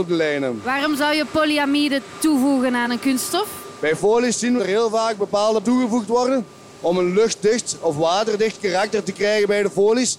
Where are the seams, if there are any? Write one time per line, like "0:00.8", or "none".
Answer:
0:04.6
0:05.6